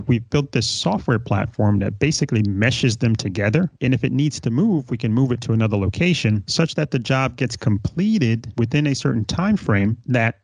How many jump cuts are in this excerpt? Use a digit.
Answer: 0